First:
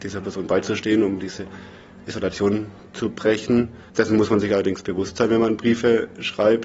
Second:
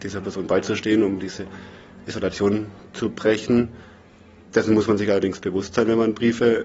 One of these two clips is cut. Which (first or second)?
first